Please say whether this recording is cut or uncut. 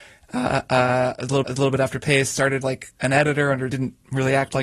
cut